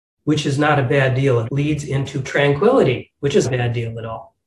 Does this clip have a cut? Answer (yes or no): yes